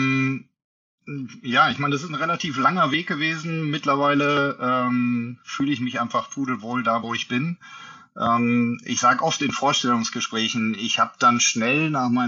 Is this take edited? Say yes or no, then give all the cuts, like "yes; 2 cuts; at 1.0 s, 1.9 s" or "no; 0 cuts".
no; 0 cuts